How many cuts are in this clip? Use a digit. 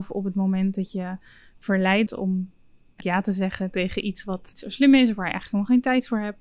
3